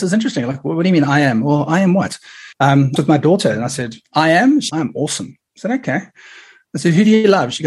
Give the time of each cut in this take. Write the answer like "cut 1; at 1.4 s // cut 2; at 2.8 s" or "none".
cut 1; at 2.5 s // cut 2; at 3.0 s // cut 3; at 4.0 s // cut 4; at 4.7 s